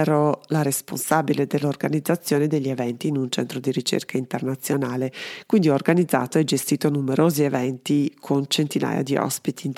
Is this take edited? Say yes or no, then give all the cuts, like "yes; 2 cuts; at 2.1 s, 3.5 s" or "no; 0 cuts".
no; 0 cuts